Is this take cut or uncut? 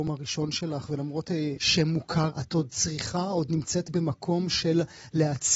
cut